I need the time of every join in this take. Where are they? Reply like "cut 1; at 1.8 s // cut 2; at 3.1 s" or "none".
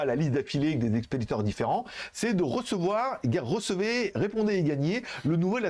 none